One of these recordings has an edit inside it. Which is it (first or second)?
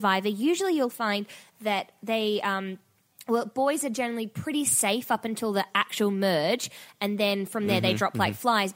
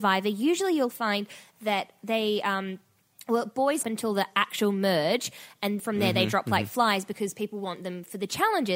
second